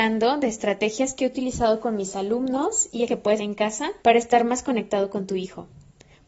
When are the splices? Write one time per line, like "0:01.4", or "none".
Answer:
0:03.1
0:03.4
0:04.0